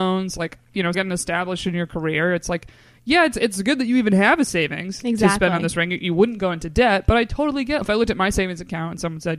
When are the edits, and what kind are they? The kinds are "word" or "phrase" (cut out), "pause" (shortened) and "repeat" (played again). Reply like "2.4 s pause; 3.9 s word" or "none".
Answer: 0.9 s word; 7.8 s phrase